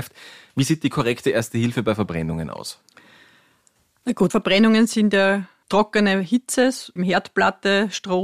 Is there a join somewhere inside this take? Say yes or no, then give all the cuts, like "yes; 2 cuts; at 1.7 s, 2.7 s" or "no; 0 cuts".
yes; 3 cuts; at 4.3 s, 5.6 s, 7.0 s